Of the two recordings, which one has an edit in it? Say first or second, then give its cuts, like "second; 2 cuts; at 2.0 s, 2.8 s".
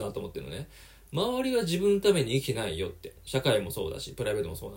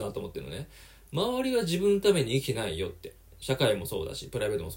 first; 1 cut; at 3.2 s